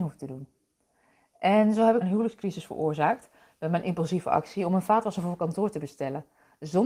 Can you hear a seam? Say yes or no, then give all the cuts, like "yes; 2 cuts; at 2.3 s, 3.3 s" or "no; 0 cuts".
yes; 1 cut; at 2.0 s